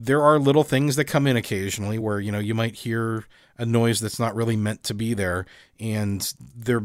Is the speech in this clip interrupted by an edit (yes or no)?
no